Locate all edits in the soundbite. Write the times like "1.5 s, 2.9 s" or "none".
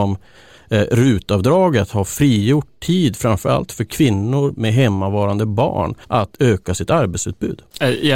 6.0 s